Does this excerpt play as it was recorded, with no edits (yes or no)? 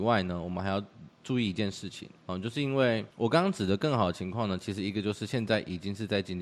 no